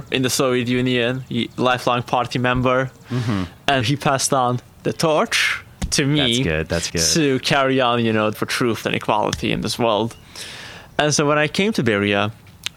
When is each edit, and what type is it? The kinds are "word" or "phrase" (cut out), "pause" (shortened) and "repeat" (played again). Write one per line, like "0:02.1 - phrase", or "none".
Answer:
0:03.8 - word
0:06.9 - word
0:08.3 - word
0:08.8 - phrase
0:10.9 - pause

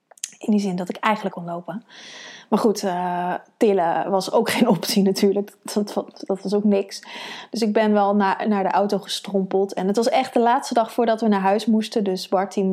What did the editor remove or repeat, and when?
0:01.3 - phrase

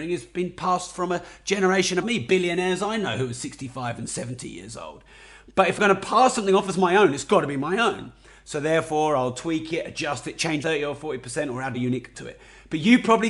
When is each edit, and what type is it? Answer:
0:02.0 - word
0:10.6 - word
0:11.7 - word
0:12.1 - word

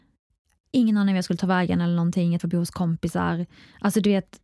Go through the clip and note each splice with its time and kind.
0:02.4 - word

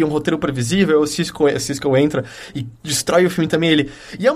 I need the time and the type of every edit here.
none

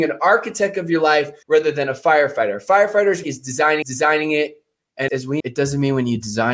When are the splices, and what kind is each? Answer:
0:01.4 - pause
0:03.2 - phrase
0:03.8 - repeat
0:05.1 - word
0:05.4 - word

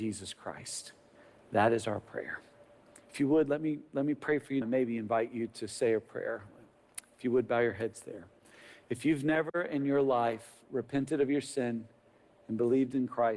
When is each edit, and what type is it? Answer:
0:03.0 - pause
0:04.6 - word

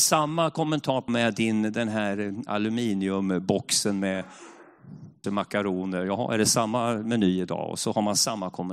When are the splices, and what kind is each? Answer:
0:01.1 - phrase
0:05.2 - word

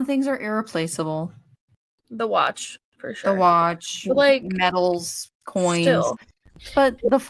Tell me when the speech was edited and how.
none

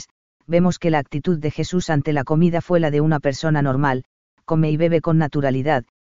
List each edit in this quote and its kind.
none

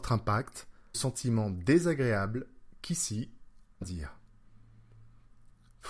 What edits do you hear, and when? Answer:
0:00.9 - word
0:03.8 - phrase

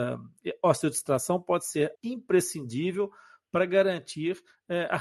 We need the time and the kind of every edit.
0:01.9 - word

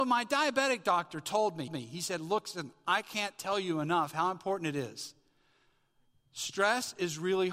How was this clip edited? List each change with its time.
0:01.7 - repeat

